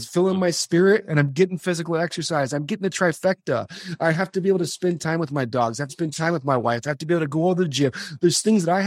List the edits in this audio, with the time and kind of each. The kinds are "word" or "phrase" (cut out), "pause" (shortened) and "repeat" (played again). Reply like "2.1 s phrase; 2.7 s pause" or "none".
5.9 s phrase